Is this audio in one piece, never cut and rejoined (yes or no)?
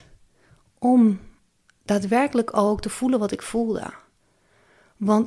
no